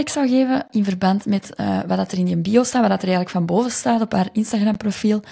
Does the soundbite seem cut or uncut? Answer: uncut